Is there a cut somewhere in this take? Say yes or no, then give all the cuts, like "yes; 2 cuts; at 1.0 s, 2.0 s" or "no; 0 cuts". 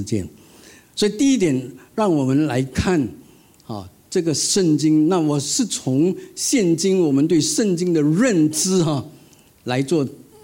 no; 0 cuts